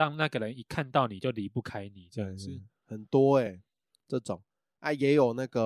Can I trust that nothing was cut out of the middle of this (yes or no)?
yes